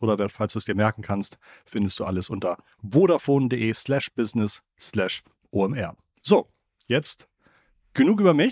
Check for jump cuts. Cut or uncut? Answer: uncut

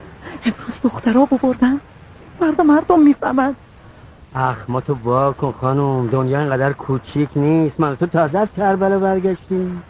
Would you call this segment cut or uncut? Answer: uncut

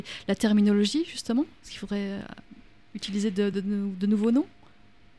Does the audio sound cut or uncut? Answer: uncut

